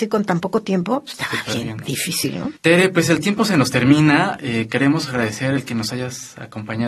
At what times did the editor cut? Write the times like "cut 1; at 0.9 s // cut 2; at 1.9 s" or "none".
cut 1; at 2.6 s